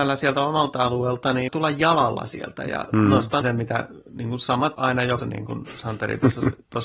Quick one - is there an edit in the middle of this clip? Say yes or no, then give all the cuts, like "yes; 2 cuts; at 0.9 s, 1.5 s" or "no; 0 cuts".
yes; 4 cuts; at 1.5 s, 3.4 s, 4.7 s, 5.2 s